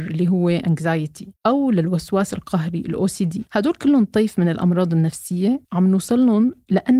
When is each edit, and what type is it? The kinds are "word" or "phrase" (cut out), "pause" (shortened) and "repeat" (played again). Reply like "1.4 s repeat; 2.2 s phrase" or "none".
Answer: 1.4 s pause; 3.5 s pause; 5.6 s pause

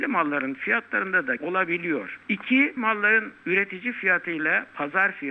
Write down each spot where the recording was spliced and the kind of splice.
1.4 s word; 2.8 s word

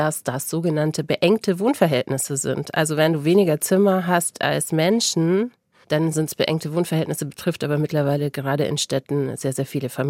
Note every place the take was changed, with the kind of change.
none

